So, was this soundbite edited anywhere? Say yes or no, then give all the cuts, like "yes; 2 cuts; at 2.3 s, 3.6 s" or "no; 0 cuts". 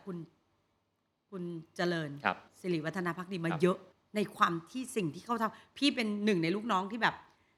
yes; 2 cuts; at 2.5 s, 3.9 s